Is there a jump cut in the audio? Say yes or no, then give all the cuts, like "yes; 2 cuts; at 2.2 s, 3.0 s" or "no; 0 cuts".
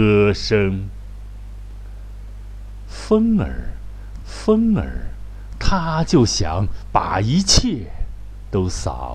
yes; 1 cut; at 4.2 s